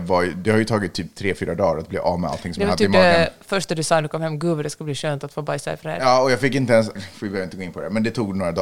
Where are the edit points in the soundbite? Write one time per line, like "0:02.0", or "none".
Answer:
0:07.0